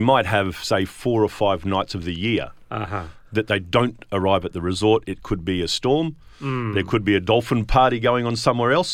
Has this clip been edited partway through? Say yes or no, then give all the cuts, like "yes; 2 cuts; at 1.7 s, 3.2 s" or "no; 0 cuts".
no; 0 cuts